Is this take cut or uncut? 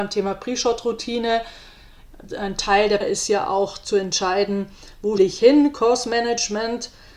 cut